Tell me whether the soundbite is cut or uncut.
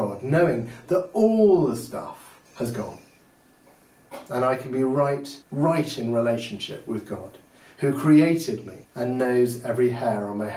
cut